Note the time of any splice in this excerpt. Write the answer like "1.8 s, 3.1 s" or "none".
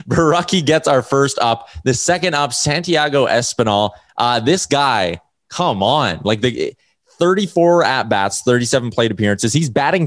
none